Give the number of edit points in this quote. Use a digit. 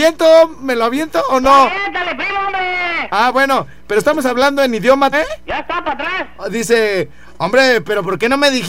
2